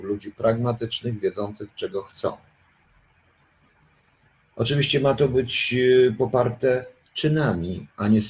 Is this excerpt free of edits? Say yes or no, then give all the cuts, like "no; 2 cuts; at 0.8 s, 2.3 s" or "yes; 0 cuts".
yes; 0 cuts